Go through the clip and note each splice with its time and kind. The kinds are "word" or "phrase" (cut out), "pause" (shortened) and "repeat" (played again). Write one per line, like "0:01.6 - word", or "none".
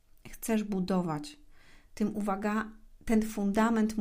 none